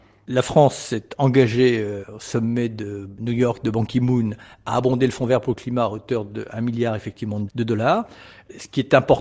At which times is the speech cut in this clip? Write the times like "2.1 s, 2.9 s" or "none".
none